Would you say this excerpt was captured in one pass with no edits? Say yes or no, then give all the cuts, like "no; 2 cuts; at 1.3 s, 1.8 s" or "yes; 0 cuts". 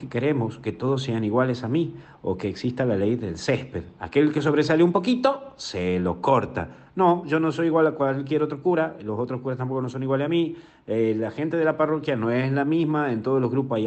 yes; 0 cuts